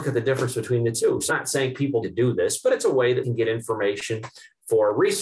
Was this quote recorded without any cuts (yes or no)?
no